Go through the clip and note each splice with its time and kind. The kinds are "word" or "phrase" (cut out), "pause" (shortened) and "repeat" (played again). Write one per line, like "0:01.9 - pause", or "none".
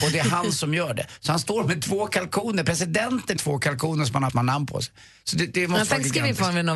0:03.4 - phrase
0:04.3 - word